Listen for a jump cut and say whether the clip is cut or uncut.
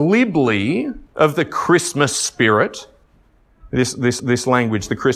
cut